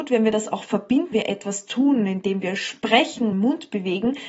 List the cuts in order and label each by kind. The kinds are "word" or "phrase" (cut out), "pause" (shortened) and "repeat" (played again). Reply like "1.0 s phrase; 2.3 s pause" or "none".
1.1 s word; 3.3 s word